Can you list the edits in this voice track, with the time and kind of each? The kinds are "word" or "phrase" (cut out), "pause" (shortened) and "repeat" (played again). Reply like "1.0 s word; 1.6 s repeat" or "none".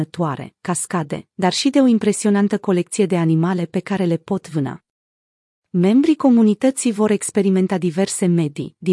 none